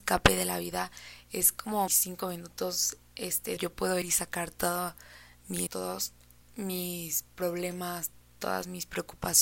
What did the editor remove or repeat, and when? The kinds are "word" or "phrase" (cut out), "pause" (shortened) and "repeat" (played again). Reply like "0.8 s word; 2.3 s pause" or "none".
1.9 s word; 3.6 s phrase; 4.0 s word; 5.7 s word; 6.4 s pause